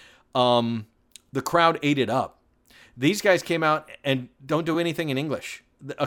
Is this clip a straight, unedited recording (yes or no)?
yes